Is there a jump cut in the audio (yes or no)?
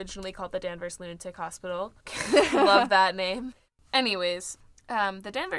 no